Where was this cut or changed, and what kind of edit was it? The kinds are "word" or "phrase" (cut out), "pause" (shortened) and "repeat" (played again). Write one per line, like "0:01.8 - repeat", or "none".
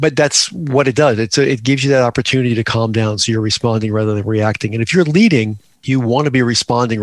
none